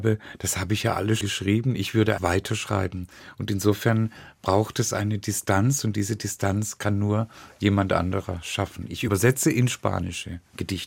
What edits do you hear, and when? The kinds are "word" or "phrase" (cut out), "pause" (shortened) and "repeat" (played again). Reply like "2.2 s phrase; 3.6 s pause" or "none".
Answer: 1.2 s word; 2.2 s word